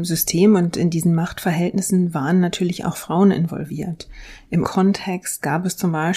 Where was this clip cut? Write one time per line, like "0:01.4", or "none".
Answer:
0:04.6